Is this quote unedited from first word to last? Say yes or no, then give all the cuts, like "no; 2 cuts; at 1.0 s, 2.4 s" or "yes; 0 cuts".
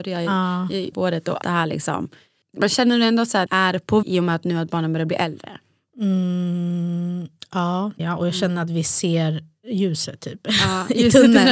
no; 6 cuts; at 0.9 s, 1.4 s, 2.6 s, 3.5 s, 4.0 s, 8.0 s